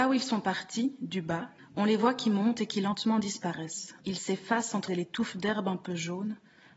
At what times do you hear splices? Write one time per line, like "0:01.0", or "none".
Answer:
0:01.6
0:04.0
0:04.9

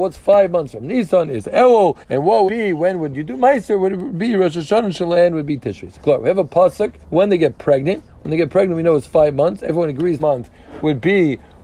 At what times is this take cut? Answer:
0:02.0
0:02.5
0:05.9
0:07.0
0:10.2

